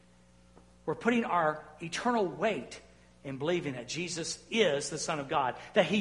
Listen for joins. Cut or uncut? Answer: uncut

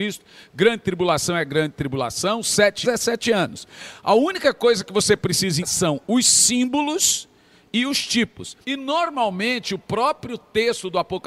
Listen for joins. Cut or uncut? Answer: cut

